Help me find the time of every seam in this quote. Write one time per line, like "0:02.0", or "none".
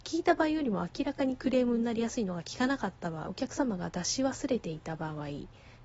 0:03.3

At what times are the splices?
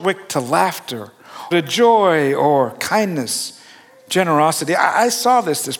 0:01.5

